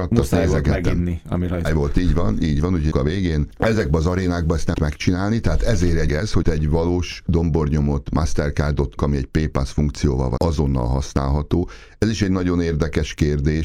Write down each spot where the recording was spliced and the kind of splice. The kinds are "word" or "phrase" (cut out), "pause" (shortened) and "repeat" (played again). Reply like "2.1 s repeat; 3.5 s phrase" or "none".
1.7 s word; 2.9 s word; 4.7 s word; 6.1 s word; 6.4 s word; 7.3 s word; 9.0 s word; 10.4 s word